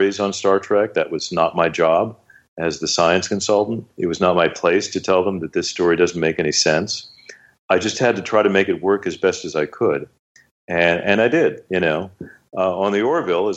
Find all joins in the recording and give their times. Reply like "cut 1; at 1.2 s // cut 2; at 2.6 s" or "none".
cut 1; at 3.9 s